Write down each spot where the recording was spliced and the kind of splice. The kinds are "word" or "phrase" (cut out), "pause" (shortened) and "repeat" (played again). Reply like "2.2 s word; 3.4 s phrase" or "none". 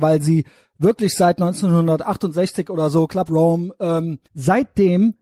3.3 s word; 4.2 s pause